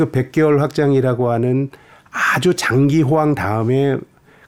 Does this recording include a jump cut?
no; 0 cuts

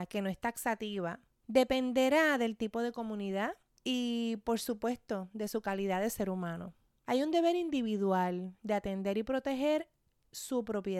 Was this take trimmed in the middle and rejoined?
no; 0 cuts

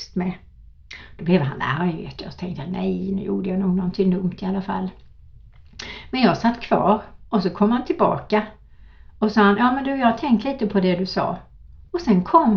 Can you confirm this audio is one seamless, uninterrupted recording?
no; 1 cut; at 7.2 s

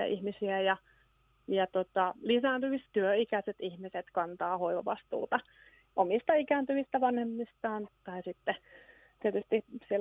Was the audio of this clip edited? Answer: yes; 2 cuts; at 2.9 s, 7.9 s

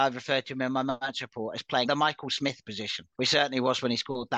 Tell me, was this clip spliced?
yes; 2 cuts; at 1.8 s, 3.1 s

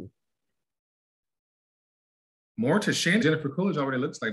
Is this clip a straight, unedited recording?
no; 1 cut; at 3.2 s

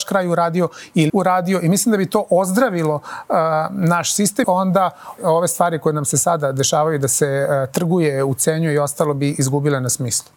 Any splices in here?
yes; 3 cuts; at 1.1 s, 4.4 s, 5.2 s

